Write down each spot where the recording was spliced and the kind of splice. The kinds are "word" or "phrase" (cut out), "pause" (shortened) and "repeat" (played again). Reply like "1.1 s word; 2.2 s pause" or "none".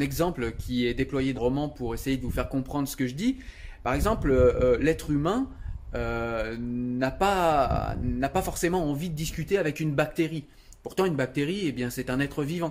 1.4 s word